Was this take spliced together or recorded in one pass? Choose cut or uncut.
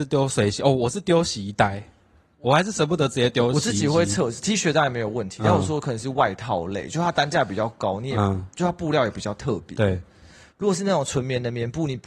uncut